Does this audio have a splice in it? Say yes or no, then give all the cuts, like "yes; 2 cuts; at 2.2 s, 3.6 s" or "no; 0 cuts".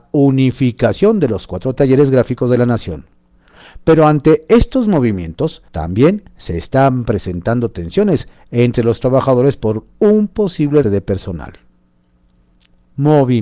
yes; 2 cuts; at 5.7 s, 10.8 s